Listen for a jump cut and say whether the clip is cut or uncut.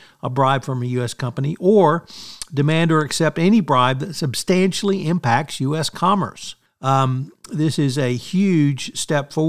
cut